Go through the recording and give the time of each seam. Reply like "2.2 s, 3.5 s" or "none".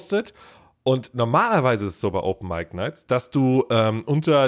none